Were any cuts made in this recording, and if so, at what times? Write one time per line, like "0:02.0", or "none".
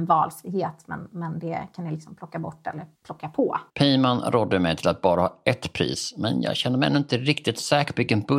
0:02.9
0:03.7